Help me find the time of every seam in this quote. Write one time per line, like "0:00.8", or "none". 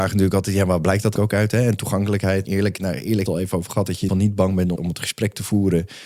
0:01.2
0:02.4
0:03.3
0:04.1
0:04.8